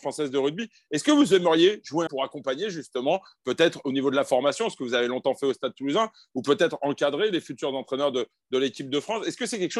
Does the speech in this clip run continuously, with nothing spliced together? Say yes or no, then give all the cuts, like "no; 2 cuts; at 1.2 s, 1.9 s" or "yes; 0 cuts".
no; 1 cut; at 2.1 s